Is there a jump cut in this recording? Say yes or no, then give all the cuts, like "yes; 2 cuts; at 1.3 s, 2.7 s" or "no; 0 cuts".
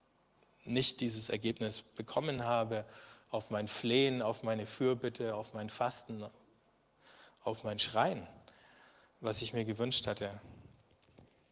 no; 0 cuts